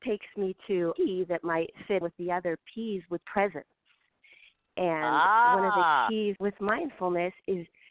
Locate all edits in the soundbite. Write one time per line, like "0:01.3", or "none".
0:01.0
0:02.0
0:03.2
0:06.4